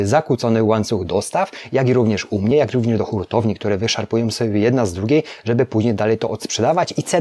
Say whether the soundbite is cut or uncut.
uncut